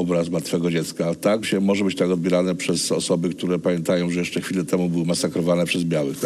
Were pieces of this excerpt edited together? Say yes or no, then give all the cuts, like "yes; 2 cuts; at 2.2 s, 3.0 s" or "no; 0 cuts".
yes; 1 cut; at 1.4 s